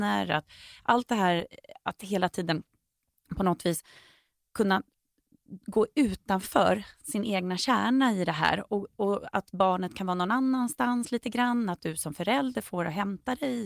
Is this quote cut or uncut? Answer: uncut